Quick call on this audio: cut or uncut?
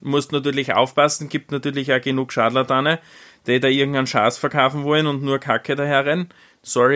uncut